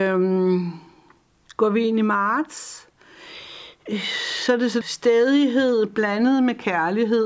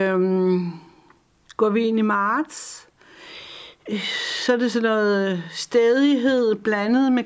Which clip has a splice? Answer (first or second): first